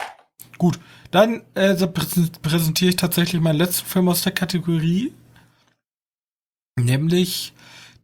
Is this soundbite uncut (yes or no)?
yes